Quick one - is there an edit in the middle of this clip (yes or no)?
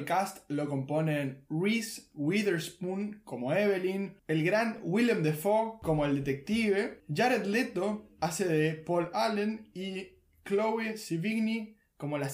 no